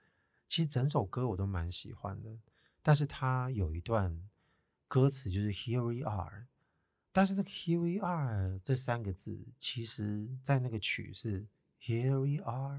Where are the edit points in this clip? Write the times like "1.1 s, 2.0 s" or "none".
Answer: none